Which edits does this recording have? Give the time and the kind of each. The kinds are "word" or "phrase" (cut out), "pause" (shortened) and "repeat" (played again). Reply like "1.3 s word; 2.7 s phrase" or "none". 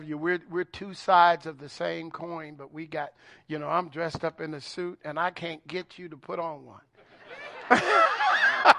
none